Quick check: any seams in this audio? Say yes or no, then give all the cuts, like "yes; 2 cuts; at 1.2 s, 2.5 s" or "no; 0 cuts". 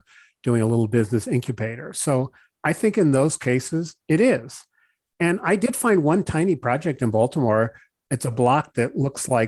no; 0 cuts